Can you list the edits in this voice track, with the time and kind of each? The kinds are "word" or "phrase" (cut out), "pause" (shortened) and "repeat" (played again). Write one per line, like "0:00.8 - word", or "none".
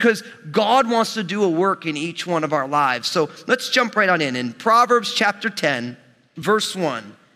none

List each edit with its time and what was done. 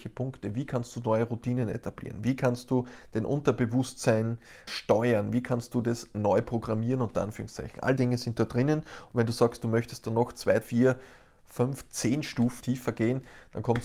0:04.7 - word
0:08.0 - word
0:10.6 - word
0:12.6 - word

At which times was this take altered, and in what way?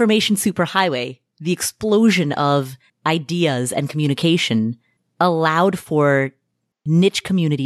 none

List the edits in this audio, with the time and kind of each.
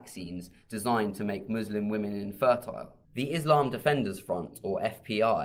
0:03.0 - pause

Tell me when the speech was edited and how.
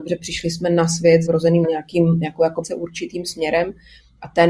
0:01.3 - word
0:01.6 - phrase
0:02.6 - phrase

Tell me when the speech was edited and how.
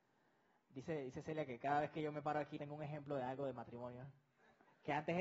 0:02.6 - word

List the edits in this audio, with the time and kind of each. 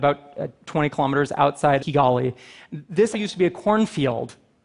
0:01.8 - word
0:03.1 - word

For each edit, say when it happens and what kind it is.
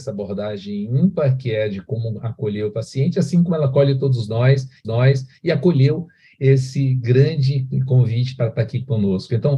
0:04.8 - repeat

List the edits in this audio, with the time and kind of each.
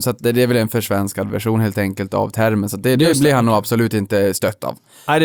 none

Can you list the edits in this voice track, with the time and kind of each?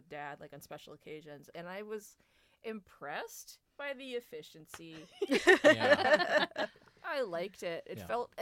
none

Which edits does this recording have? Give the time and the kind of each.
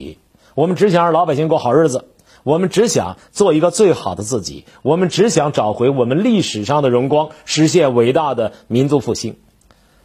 none

